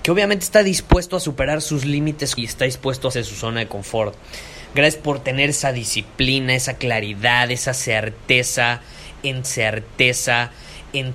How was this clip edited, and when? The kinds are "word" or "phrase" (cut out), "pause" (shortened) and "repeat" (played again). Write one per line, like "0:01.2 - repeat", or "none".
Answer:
0:02.4 - word
0:03.1 - word
0:09.4 - repeat